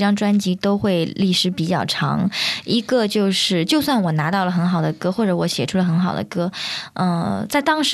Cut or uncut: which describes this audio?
uncut